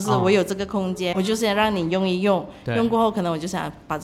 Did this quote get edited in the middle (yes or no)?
yes